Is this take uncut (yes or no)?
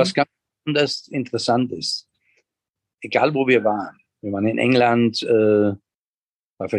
yes